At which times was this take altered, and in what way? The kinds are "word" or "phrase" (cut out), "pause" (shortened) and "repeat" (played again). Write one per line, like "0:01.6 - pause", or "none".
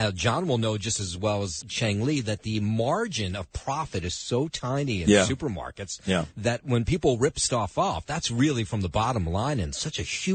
0:01.6 - word